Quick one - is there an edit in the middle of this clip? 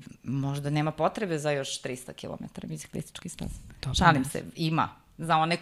no; 0 cuts

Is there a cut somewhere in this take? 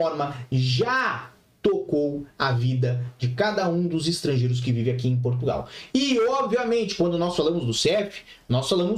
no; 0 cuts

